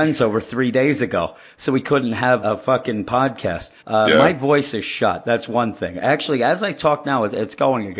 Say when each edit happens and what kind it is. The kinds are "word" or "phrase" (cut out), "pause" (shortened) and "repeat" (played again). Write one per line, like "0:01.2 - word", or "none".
0:02.4 - word
0:03.8 - pause